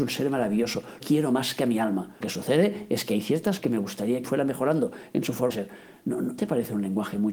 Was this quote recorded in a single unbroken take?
no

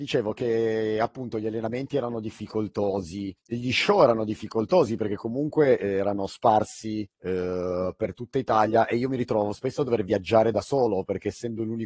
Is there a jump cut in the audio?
yes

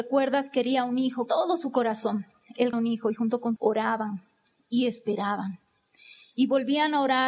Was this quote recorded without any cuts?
no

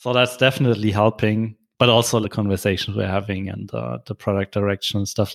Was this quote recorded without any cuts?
no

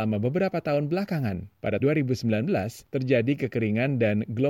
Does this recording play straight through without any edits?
no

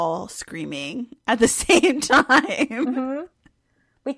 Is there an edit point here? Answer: no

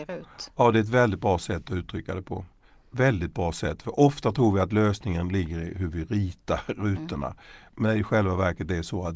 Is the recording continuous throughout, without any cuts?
yes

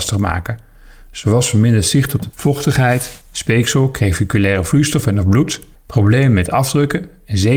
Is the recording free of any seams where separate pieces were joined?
no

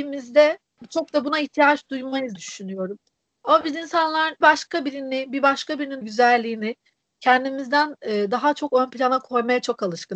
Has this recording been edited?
yes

